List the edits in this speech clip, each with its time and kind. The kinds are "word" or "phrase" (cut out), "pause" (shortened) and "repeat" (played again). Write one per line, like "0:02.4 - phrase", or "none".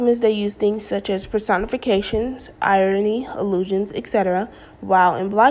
none

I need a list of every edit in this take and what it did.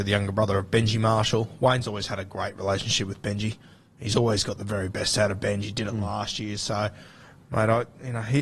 none

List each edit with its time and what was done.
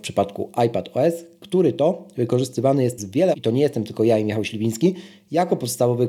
0:03.0 - word
0:03.3 - word

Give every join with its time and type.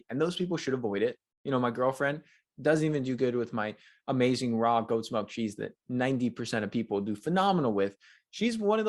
none

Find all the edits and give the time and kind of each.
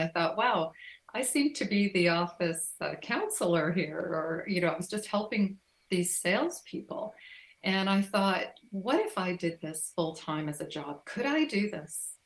none

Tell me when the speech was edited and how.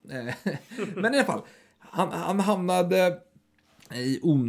none

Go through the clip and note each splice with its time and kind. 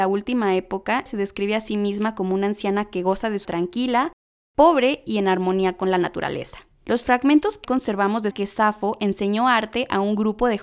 0:01.1 - word
0:03.4 - word
0:06.7 - pause
0:07.6 - word
0:08.3 - phrase

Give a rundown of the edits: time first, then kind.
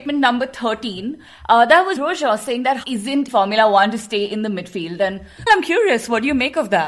0:02.0 - word
0:02.8 - word
0:03.3 - word
0:05.5 - word

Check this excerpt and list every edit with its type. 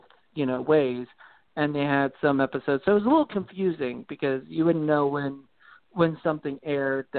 none

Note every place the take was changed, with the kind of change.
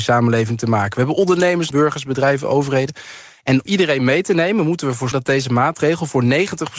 0:01.7 - phrase
0:03.7 - word
0:05.1 - word

